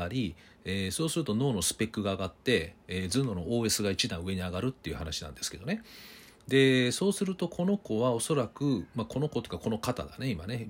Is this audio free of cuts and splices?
yes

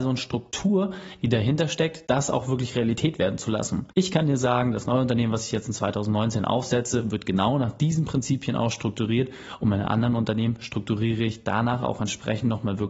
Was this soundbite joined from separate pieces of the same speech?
yes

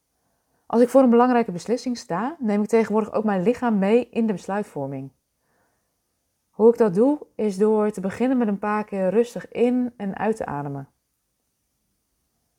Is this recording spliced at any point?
no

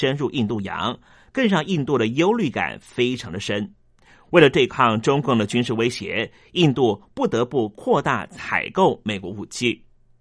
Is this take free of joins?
yes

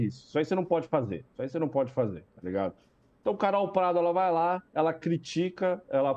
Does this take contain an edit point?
no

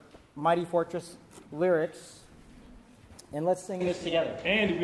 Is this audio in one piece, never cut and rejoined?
no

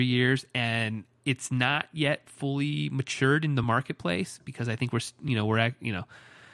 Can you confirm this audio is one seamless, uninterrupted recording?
yes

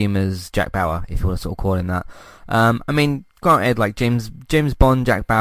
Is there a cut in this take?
no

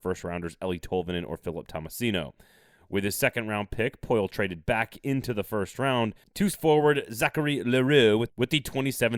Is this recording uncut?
no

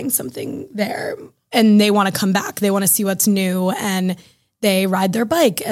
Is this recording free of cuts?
yes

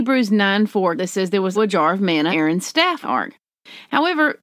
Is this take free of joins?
no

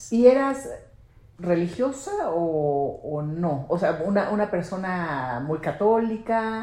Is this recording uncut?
yes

